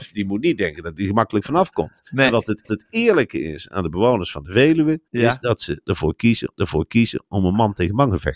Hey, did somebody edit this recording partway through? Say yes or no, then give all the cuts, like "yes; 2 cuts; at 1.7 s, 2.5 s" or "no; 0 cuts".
yes; 4 cuts; at 2.1 s, 2.6 s, 5.1 s, 6.6 s